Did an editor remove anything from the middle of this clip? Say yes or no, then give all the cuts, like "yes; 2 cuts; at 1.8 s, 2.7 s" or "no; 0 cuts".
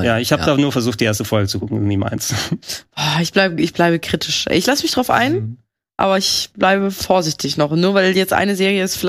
no; 0 cuts